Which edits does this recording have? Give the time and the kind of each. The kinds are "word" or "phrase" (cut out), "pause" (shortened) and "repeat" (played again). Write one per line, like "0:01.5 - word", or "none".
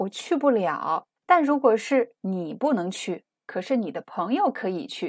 0:01.2 - pause
0:02.2 - pause